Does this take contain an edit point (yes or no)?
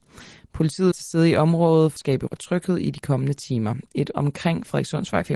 yes